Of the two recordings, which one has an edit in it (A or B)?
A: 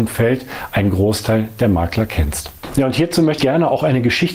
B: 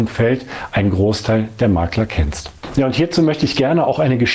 A